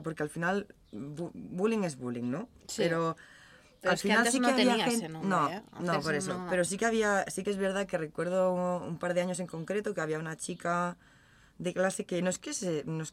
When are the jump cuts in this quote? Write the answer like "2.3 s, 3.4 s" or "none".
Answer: none